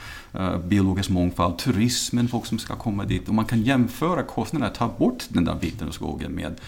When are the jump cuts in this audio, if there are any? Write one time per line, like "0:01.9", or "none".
none